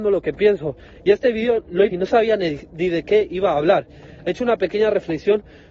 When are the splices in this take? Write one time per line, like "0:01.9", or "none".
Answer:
0:01.9